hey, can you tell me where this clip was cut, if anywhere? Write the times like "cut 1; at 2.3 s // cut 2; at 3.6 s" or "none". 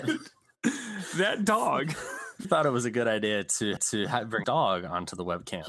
cut 1; at 2.4 s // cut 2; at 3.8 s // cut 3; at 4.4 s